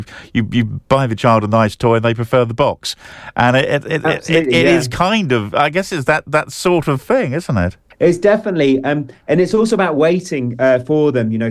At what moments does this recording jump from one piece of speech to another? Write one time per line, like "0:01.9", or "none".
0:07.9